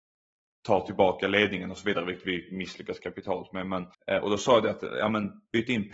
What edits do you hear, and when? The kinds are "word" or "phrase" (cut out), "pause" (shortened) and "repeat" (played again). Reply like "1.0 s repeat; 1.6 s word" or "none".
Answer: 3.9 s pause